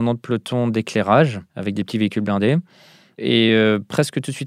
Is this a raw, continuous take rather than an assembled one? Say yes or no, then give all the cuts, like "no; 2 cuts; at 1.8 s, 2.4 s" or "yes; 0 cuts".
yes; 0 cuts